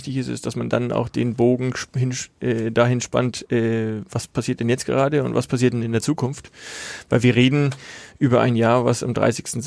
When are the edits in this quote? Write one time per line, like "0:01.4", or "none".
none